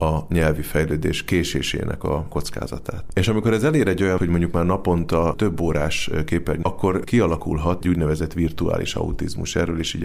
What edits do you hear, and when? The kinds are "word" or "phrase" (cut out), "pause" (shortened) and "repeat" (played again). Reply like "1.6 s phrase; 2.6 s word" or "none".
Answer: 4.2 s word; 6.6 s phrase; 7.8 s word